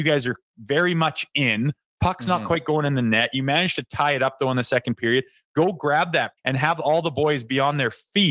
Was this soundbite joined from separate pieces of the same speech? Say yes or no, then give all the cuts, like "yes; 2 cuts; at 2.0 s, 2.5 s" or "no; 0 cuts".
yes; 1 cut; at 6.4 s